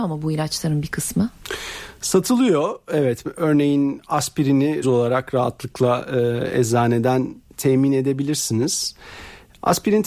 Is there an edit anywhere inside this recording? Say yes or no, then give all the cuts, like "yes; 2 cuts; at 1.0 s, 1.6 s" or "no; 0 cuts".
yes; 1 cut; at 4.8 s